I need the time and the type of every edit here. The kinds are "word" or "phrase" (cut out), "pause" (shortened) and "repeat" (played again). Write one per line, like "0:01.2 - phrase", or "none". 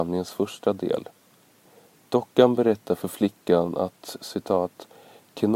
none